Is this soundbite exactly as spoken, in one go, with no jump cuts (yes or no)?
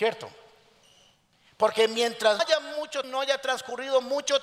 no